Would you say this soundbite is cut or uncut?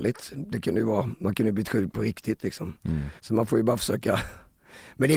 cut